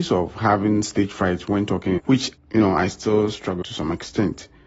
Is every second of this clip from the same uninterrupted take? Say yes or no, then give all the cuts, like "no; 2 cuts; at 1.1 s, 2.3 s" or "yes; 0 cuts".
no; 2 cuts; at 2.0 s, 3.6 s